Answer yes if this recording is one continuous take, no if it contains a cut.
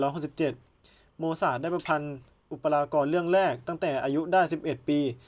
yes